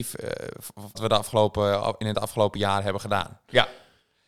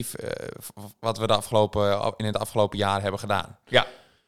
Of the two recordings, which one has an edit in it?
first; 1 cut; at 0.9 s

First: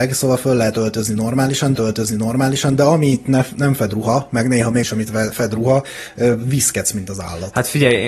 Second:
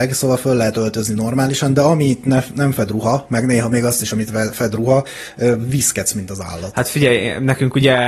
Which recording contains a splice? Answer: first; 2 cuts; at 1.8 s, 4.8 s

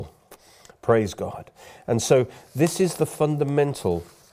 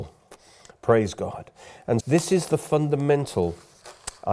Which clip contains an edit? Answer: second; 1 cut; at 2.0 s

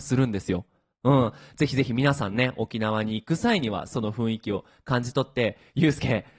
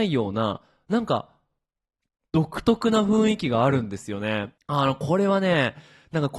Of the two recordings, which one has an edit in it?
second; 1 cut; at 4.6 s

